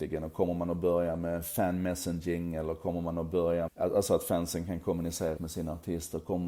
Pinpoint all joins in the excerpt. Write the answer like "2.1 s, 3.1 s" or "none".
3.7 s, 5.4 s

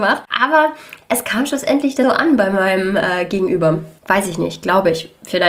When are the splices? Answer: 2.0 s, 4.0 s

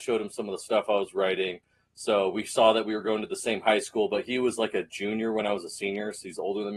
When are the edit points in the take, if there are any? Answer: none

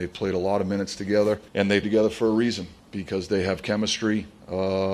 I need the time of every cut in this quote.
1.5 s, 1.8 s

